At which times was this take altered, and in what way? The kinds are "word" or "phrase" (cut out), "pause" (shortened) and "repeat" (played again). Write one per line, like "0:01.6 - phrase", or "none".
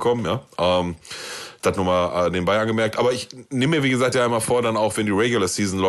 0:04.1 - word